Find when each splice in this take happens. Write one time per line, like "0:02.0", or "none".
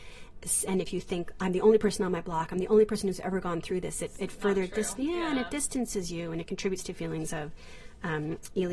none